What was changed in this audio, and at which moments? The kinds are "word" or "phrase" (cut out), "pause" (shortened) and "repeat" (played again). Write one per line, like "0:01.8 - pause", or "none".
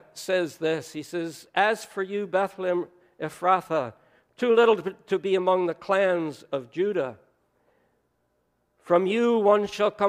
none